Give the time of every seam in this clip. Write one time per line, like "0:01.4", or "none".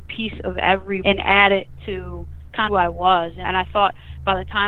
0:01.0
0:02.7
0:03.4